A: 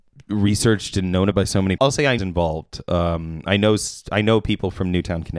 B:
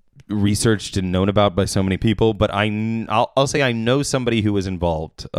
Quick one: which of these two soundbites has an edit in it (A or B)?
A